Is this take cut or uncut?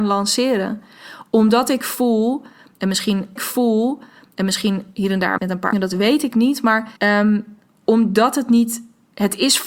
cut